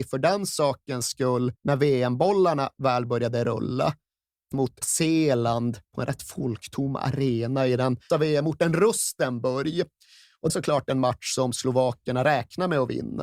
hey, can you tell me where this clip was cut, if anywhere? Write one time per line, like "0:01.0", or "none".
0:01.6
0:04.5
0:04.8
0:05.8
0:08.1
0:10.5